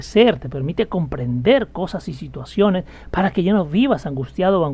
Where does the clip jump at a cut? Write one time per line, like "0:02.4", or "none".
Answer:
none